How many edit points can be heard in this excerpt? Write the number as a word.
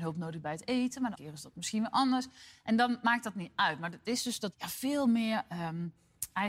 two